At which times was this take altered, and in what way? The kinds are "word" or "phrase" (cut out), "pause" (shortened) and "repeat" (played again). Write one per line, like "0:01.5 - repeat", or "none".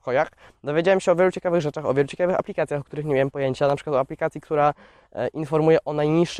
none